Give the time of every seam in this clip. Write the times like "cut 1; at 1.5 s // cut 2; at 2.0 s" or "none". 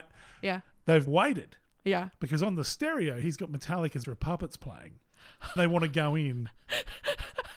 cut 1; at 1.1 s // cut 2; at 4.0 s // cut 3; at 5.6 s